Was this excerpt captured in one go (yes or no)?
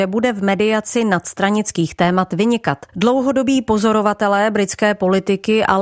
no